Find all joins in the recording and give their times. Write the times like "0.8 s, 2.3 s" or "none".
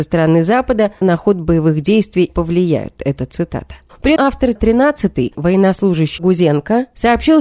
1.0 s, 2.3 s, 4.2 s, 4.6 s, 5.3 s, 6.2 s